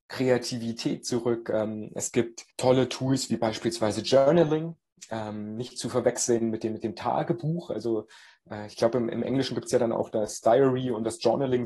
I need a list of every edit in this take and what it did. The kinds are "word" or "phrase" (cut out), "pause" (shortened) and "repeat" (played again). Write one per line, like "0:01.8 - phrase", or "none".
0:02.5 - pause